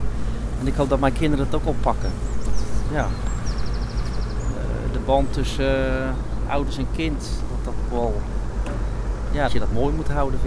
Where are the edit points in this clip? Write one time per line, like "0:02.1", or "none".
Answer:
0:02.5
0:07.9
0:09.5